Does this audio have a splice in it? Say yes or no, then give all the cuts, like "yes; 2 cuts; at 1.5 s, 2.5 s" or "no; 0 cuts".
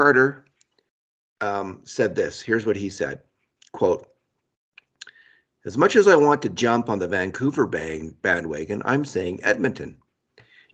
no; 0 cuts